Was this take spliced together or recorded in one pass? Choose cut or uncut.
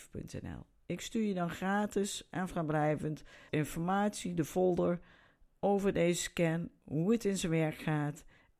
cut